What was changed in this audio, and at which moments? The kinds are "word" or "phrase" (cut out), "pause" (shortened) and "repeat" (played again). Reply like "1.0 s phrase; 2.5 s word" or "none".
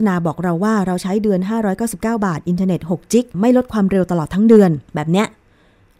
3.3 s pause; 4.8 s pause